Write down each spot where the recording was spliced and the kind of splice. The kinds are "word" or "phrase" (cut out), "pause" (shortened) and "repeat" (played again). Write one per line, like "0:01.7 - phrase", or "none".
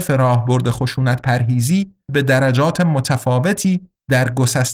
0:02.1 - word